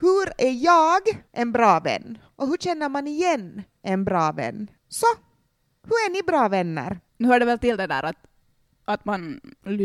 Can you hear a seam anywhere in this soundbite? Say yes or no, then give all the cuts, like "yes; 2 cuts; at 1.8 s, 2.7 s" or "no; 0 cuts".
yes; 3 cuts; at 1.3 s, 4.8 s, 7.1 s